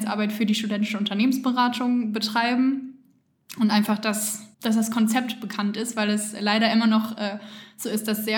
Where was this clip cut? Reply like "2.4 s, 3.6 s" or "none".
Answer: 4.5 s